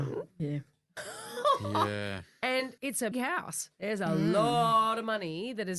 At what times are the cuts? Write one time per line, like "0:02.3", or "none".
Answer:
0:02.8
0:03.1